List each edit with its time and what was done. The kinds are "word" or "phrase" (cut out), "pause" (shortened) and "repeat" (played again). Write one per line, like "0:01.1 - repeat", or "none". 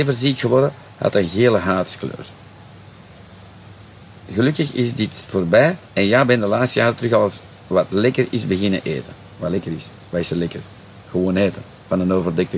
0:05.9 - pause
0:09.3 - pause